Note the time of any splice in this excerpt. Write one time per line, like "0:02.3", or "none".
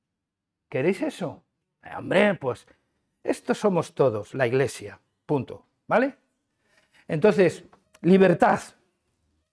0:01.6